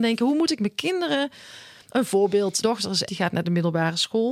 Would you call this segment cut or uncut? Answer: cut